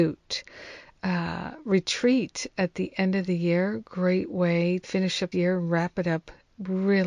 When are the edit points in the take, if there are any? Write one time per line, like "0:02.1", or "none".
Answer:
0:04.8
0:05.3

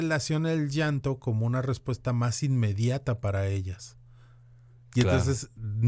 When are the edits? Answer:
none

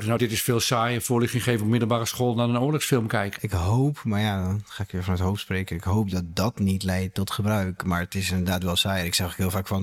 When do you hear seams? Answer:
none

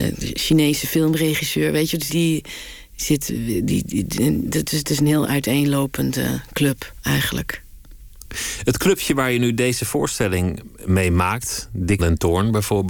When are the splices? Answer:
0:02.1
0:12.0

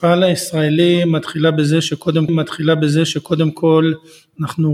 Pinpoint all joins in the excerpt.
0:02.3

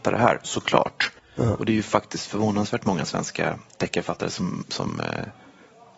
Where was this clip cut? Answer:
none

